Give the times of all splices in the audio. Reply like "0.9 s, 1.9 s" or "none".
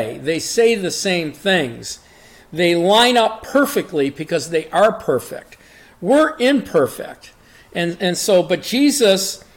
none